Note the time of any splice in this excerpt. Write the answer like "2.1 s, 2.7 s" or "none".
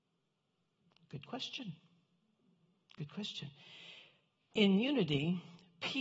none